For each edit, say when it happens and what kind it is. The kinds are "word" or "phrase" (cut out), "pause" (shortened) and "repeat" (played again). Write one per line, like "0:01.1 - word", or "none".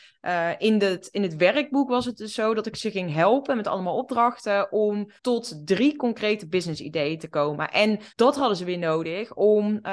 0:05.2 - pause
0:08.1 - pause